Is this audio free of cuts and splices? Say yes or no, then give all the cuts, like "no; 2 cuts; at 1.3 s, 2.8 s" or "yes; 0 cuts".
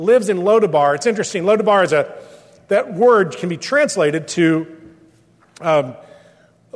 yes; 0 cuts